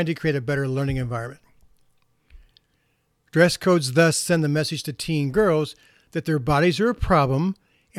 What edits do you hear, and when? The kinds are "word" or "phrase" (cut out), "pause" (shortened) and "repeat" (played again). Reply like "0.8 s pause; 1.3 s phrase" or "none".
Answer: none